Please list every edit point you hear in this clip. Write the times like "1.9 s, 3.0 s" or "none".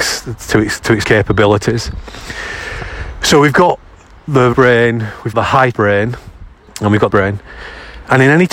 1.0 s, 4.5 s, 5.3 s, 5.7 s, 6.7 s, 7.1 s